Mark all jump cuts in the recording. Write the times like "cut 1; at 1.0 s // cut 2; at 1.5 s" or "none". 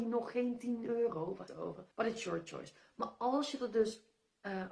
cut 1; at 1.5 s // cut 2; at 1.9 s

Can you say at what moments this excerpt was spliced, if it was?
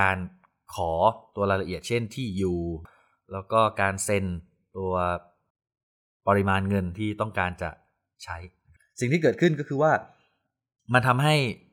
none

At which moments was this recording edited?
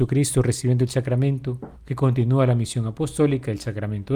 cut 1; at 1.8 s

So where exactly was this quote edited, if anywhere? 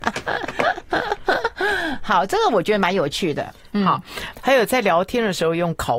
cut 1; at 4.3 s

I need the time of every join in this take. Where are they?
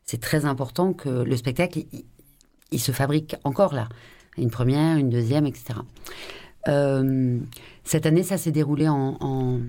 none

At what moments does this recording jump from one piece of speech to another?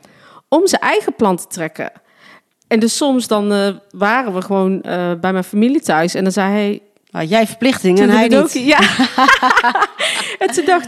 none

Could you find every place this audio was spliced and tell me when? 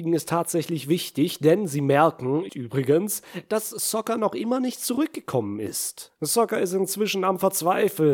cut 1; at 2.5 s

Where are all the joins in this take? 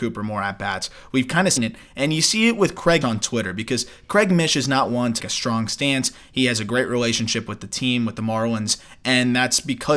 cut 1; at 1.6 s // cut 2; at 3.0 s // cut 3; at 5.2 s

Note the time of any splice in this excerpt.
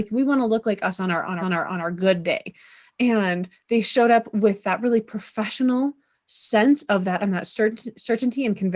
cut 1; at 1.4 s // cut 2; at 7.2 s

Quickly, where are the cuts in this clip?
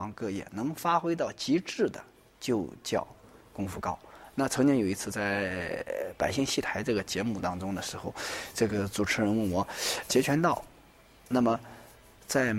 cut 1; at 10.1 s

